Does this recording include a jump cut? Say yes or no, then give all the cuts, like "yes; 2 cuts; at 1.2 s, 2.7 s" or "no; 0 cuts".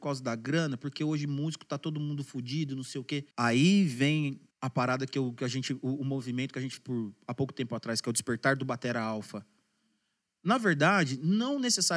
yes; 3 cuts; at 3.3 s, 4.5 s, 6.8 s